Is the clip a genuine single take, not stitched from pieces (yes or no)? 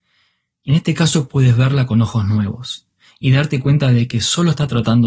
yes